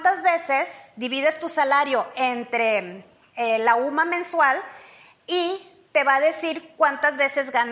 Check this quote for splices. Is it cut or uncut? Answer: uncut